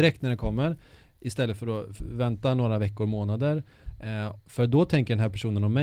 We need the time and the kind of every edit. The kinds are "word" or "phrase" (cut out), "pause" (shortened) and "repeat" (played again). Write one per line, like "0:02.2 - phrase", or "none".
0:04.4 - pause